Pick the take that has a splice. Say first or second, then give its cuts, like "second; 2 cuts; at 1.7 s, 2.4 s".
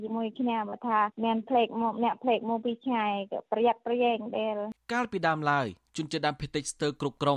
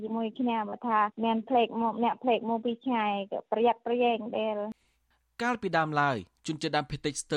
first; 1 cut; at 4.8 s